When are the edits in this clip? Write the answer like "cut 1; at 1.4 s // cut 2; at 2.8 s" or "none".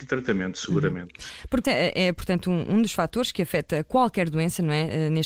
cut 1; at 1.6 s